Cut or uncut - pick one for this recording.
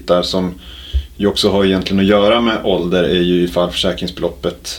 uncut